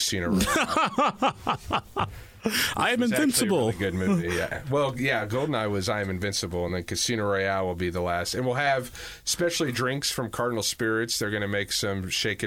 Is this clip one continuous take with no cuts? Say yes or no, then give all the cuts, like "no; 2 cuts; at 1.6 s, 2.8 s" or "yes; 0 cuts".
yes; 0 cuts